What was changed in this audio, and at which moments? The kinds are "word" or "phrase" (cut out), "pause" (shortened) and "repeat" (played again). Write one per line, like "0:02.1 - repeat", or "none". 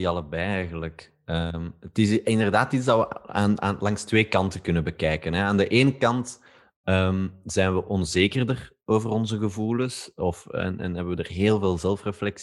none